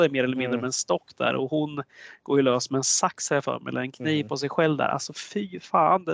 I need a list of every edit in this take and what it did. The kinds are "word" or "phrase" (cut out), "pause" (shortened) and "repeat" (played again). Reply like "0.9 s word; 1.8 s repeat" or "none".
none